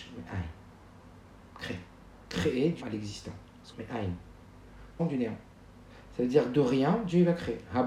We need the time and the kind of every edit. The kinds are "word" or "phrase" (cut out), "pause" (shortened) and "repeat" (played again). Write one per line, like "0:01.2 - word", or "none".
0:02.8 - word
0:03.7 - phrase
0:05.0 - word